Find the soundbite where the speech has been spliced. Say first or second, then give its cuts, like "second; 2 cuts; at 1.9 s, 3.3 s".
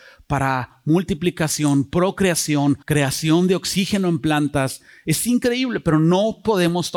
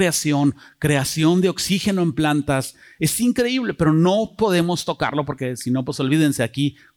first; 1 cut; at 2.8 s